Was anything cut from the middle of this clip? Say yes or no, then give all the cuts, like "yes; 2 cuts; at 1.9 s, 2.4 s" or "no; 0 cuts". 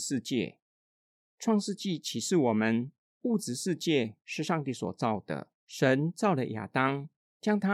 yes; 2 cuts; at 3.1 s, 5.6 s